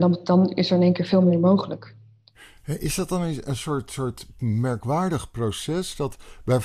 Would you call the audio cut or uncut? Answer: uncut